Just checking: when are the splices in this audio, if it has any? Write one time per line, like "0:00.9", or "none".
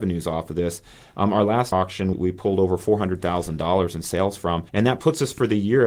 0:01.7
0:02.1
0:04.7